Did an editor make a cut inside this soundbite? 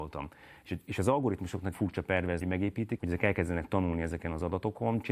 yes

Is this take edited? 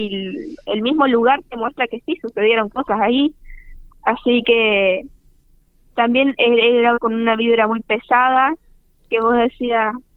yes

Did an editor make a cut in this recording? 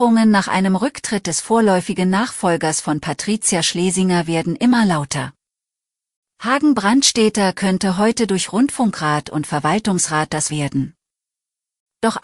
yes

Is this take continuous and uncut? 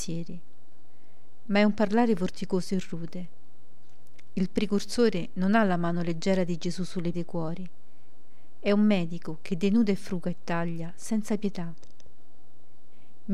no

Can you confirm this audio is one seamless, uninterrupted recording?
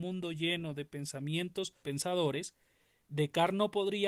no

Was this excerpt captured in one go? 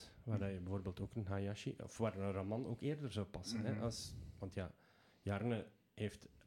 yes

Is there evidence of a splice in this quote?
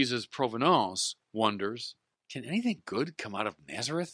yes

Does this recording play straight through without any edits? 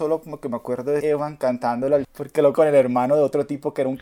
no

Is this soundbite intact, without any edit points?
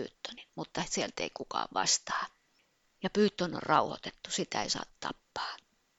yes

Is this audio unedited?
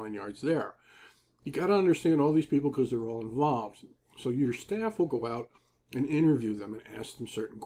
yes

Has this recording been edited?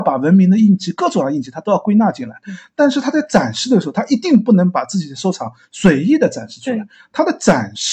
no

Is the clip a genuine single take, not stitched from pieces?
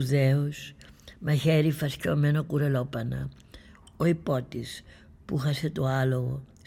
yes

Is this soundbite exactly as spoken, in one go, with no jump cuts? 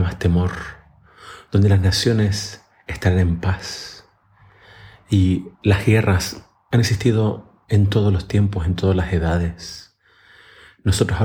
no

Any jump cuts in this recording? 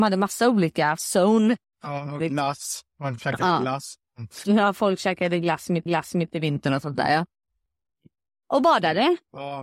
yes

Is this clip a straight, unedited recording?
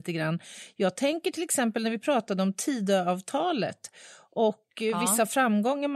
yes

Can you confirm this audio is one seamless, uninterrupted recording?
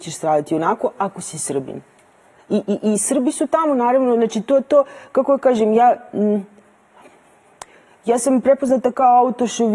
yes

